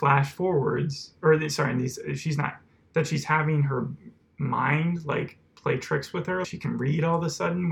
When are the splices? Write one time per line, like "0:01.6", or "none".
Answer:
0:06.4

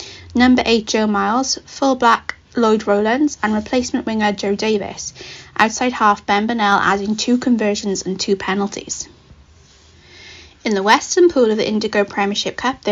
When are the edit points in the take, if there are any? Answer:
none

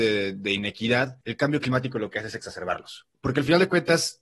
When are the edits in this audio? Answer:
0:01.2
0:03.1

